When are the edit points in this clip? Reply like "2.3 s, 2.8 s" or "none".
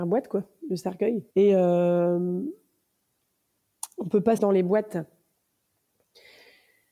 1.3 s, 4.4 s